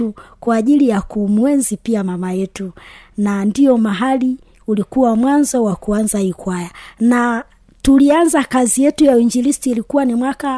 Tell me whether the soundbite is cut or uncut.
uncut